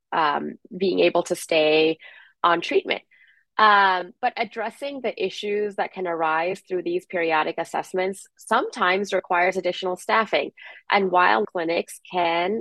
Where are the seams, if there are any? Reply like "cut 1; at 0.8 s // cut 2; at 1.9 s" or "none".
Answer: cut 1; at 11.4 s